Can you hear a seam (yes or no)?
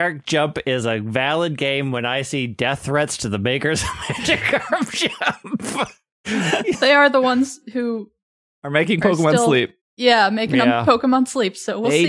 yes